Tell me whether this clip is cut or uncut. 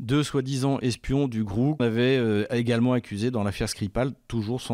cut